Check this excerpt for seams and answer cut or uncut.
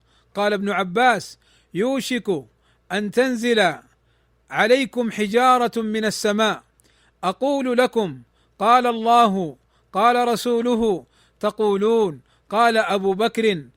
uncut